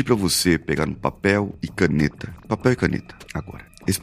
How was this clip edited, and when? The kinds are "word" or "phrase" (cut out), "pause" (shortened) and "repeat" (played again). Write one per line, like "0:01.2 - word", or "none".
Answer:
none